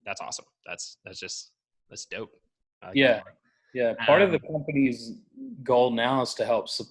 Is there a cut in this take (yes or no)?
no